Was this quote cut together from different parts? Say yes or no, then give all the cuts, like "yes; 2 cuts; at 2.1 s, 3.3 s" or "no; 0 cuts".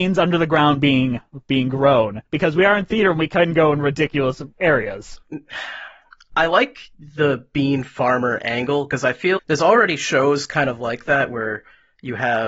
yes; 1 cut; at 9.4 s